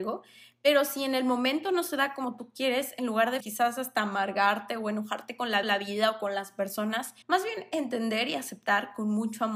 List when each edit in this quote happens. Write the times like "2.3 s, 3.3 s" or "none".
3.4 s, 5.6 s, 7.2 s